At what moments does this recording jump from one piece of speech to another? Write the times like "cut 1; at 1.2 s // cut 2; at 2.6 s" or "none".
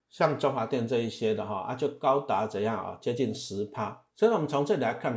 cut 1; at 4.1 s